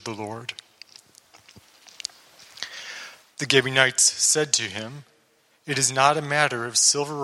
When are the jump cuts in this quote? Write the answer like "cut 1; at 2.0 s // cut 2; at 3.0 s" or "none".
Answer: none